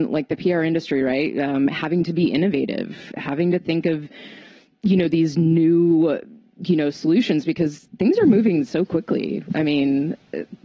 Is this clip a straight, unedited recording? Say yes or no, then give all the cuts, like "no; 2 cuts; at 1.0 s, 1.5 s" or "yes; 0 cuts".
yes; 0 cuts